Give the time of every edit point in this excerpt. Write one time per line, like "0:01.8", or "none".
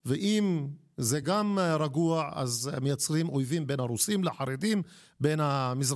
none